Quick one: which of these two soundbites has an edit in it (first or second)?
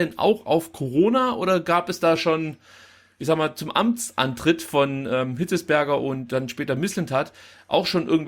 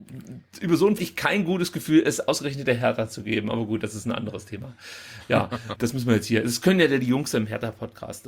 second